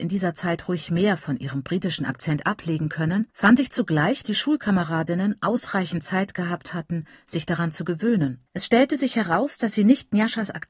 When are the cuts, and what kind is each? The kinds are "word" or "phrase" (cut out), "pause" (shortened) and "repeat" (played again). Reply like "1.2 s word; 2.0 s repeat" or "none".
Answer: 3.3 s pause; 4.2 s word; 8.5 s pause